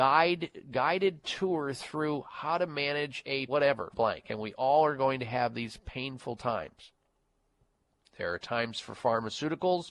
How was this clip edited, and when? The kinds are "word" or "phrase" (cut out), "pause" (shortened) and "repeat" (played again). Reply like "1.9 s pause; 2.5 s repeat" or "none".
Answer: 3.5 s word; 3.9 s phrase